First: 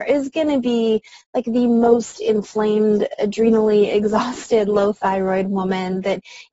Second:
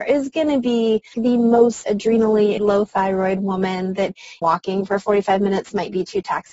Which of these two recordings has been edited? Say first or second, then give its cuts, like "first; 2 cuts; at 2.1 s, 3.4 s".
second; 4 cuts; at 1.1 s, 1.8 s, 2.6 s, 4.4 s